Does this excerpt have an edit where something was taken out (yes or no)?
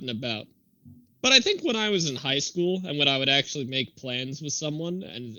yes